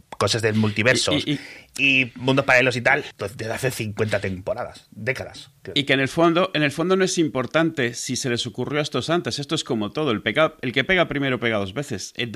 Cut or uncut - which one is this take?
uncut